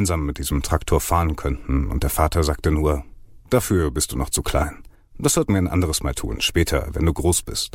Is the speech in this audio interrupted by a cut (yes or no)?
yes